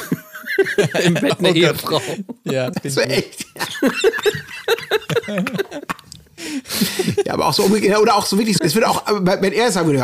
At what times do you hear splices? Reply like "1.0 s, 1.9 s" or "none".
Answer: 2.7 s, 3.0 s, 8.6 s